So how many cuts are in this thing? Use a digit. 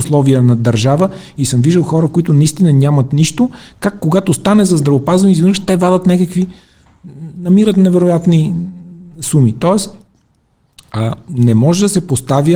0